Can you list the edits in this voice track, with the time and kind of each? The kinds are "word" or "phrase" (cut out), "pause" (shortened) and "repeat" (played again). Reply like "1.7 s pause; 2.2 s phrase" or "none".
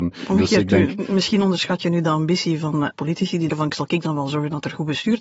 2.9 s word; 3.5 s word